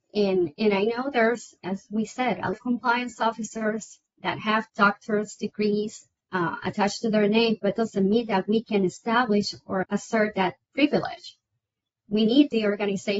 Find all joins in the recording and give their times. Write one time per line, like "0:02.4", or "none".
0:02.5
0:04.7
0:06.2
0:07.8
0:09.8
0:10.6